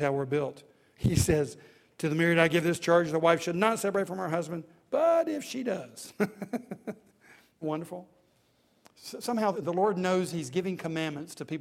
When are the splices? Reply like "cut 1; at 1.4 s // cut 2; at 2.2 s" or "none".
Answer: cut 1; at 7.6 s // cut 2; at 9.5 s